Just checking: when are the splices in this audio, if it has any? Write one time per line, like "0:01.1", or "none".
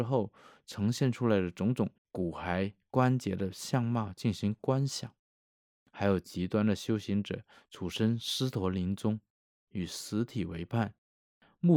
0:02.0